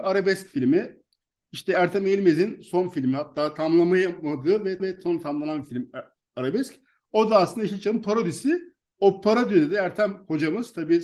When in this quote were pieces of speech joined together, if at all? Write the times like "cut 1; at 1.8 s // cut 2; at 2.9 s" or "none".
cut 1; at 4.8 s

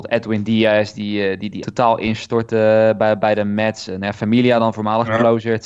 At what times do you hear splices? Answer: cut 1; at 1.6 s

